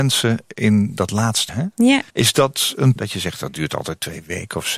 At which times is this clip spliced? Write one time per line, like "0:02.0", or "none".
0:01.5
0:02.1
0:03.0

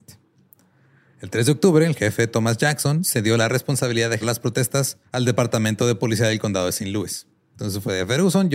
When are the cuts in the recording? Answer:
0:04.2
0:05.0

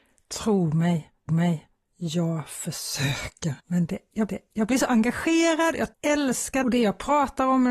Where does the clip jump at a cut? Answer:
0:01.3
0:03.6
0:04.3
0:05.9
0:06.6

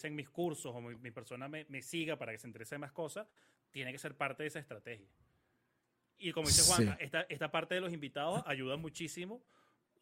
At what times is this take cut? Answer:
none

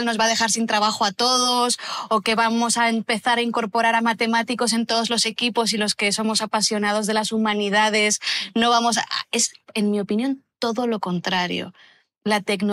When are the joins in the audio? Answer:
none

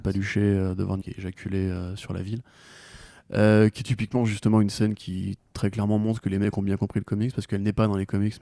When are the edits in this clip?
0:01.0

